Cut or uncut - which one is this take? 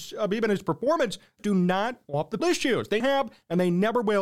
cut